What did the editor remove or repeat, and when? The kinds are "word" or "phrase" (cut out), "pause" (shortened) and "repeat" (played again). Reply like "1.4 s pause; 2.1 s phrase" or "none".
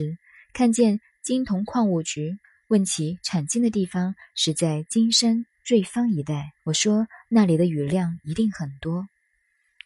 2.4 s pause; 6.6 s pause